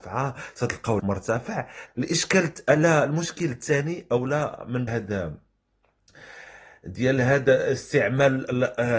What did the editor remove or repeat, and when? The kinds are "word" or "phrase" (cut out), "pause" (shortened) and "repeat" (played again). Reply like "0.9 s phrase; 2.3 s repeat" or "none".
1.0 s word; 1.9 s phrase; 4.9 s phrase